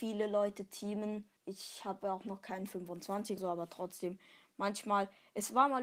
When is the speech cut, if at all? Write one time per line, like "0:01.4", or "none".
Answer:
0:01.4
0:03.4